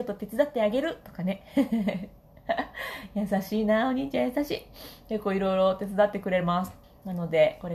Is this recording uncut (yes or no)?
no